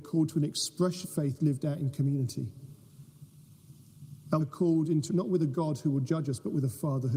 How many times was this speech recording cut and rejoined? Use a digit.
3